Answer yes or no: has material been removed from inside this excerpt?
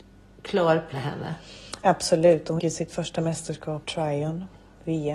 yes